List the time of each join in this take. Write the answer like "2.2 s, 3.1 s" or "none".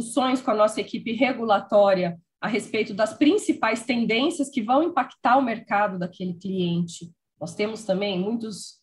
none